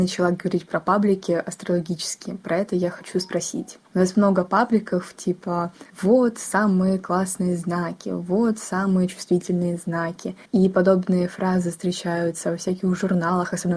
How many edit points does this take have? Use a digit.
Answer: 3